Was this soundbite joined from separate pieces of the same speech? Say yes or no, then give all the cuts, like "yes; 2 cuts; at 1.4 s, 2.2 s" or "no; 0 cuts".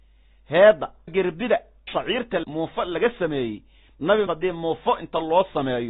yes; 4 cuts; at 1.1 s, 1.9 s, 2.4 s, 4.3 s